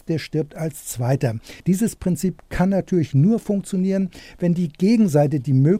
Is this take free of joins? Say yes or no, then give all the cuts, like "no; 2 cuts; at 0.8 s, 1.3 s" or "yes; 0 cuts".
no; 1 cut; at 1.6 s